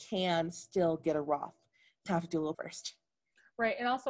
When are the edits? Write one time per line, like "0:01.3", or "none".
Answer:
0:02.1
0:02.5